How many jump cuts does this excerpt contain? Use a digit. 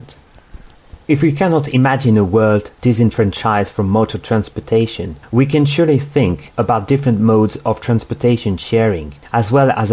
1